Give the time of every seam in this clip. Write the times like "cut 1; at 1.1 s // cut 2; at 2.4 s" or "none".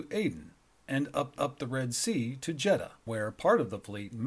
cut 1; at 1.4 s // cut 2; at 3.1 s